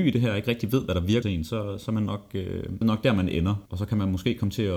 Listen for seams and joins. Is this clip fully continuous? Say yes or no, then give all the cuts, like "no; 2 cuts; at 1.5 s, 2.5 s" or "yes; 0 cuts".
no; 3 cuts; at 1.2 s, 2.8 s, 3.7 s